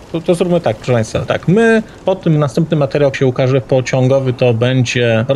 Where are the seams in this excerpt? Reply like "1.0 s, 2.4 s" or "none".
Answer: 1.3 s, 2.0 s, 2.4 s, 3.1 s